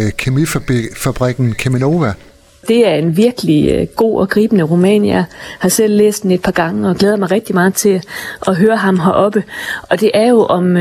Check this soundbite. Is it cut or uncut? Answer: uncut